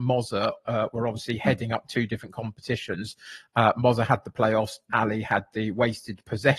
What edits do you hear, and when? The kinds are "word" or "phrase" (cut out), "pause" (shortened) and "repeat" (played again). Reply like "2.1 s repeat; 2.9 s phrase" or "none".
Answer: none